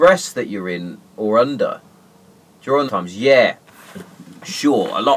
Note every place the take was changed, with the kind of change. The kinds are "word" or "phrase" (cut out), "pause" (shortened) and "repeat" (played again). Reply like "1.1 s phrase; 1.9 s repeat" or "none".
2.9 s word